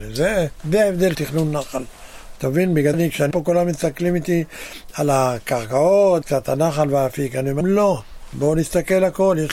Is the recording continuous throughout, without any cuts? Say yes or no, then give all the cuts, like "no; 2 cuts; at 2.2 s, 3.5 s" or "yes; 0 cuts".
no; 5 cuts; at 1.1 s, 2.9 s, 3.3 s, 6.2 s, 7.6 s